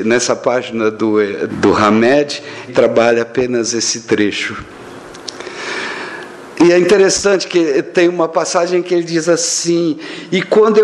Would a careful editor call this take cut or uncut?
cut